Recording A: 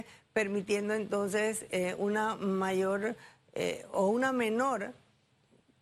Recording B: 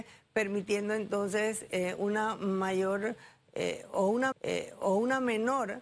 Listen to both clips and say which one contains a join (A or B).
B